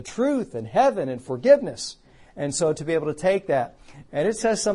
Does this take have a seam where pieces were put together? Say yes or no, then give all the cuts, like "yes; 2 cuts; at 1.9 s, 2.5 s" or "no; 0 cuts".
no; 0 cuts